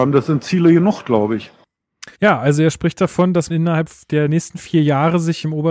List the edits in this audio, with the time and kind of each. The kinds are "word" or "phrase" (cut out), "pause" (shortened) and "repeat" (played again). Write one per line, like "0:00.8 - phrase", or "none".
0:02.1 - pause
0:03.5 - word